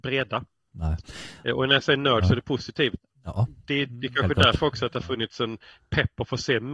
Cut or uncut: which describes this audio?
uncut